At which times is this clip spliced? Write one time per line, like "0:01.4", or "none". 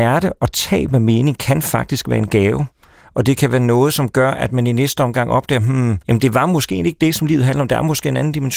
0:06.0